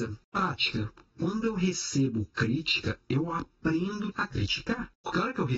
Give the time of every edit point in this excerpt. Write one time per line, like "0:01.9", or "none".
0:04.1